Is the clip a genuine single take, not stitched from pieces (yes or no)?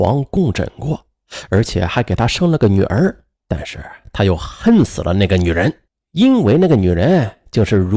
no